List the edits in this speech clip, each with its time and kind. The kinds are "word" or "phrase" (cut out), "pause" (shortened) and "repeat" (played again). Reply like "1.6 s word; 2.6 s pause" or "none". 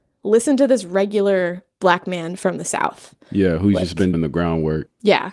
4.1 s word